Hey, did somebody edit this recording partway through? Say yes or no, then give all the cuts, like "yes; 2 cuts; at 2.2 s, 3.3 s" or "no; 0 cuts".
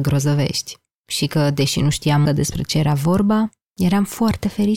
yes; 1 cut; at 2.3 s